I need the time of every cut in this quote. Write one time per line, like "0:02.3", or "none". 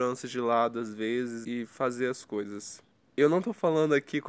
0:01.4
0:02.9